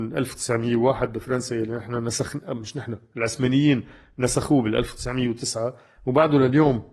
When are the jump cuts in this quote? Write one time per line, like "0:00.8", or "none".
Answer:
none